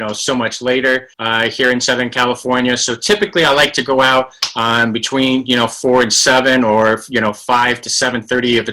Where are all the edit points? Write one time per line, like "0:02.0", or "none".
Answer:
0:01.1